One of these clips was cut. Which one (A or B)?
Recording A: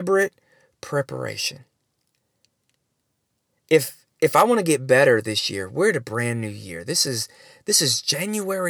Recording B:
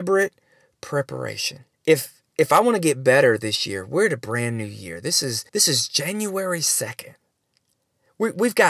B